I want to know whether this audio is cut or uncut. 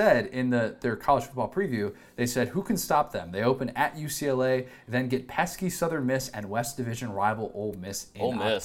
uncut